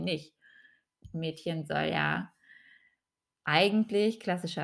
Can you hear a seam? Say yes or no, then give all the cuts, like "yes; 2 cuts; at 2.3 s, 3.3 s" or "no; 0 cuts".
no; 0 cuts